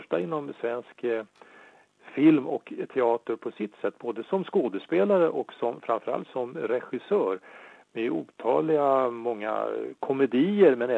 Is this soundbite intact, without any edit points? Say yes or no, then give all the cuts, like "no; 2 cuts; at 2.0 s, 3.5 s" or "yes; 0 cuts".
yes; 0 cuts